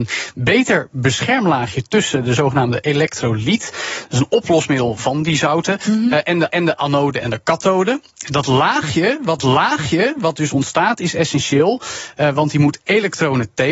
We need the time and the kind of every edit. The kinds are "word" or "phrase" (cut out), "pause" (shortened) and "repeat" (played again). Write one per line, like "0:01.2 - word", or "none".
0:06.5 - repeat
0:09.4 - repeat